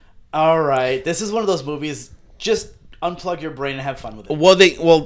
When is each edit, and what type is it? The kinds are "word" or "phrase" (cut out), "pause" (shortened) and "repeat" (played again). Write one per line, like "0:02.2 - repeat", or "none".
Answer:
none